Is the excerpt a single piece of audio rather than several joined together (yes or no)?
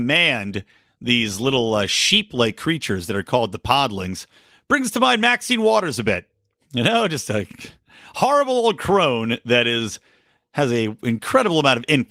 yes